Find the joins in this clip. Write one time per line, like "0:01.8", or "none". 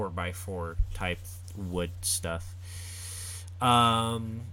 none